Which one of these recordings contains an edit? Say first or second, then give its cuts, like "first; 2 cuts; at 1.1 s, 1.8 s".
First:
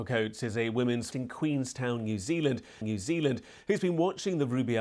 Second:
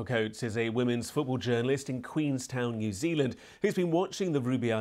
first; 2 cuts; at 1.1 s, 2.8 s